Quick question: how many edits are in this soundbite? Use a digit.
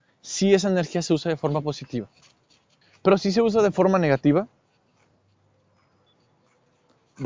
1